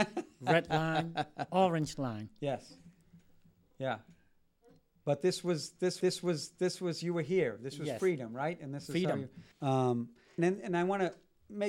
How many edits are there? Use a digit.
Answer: 3